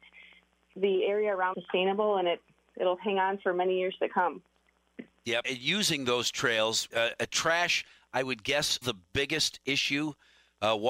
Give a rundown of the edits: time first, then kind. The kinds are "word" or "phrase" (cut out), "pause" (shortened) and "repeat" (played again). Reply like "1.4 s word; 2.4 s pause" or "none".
1.5 s word; 5.4 s word; 6.9 s word; 8.8 s word